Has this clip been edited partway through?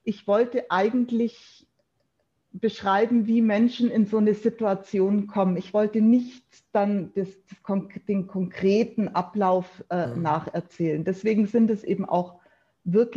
no; 0 cuts

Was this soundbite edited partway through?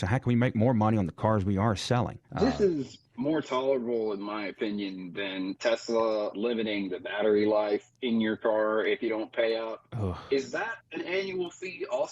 yes; 3 cuts; at 2.2 s, 3.1 s, 10.8 s

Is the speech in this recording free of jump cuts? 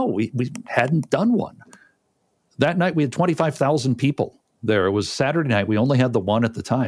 yes; 0 cuts

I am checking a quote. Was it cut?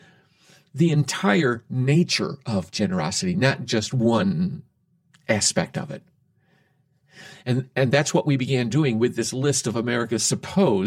no; 0 cuts

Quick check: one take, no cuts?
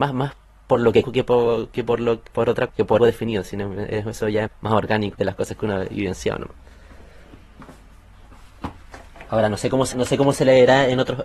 no; 6 cuts; at 1.0 s, 2.7 s, 3.0 s, 4.5 s, 5.1 s, 9.9 s

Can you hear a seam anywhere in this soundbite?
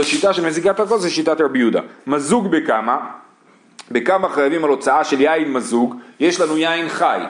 no; 0 cuts

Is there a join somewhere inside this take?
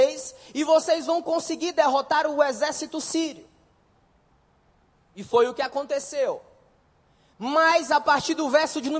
no; 0 cuts

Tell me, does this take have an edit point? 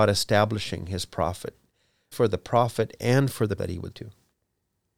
yes; 3 cuts; at 2.1 s, 3.6 s, 3.9 s

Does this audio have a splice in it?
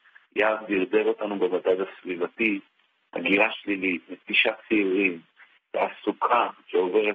no; 0 cuts

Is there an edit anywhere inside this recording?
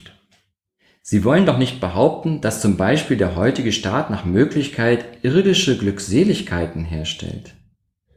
no; 0 cuts

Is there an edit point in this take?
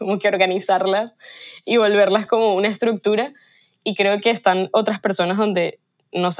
no; 0 cuts

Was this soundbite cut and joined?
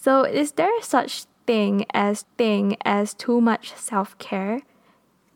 yes; 1 cut; at 2.2 s

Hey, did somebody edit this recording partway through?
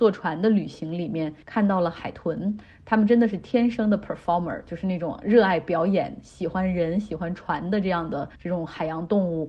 yes; 2 cuts; at 1.4 s, 8.3 s

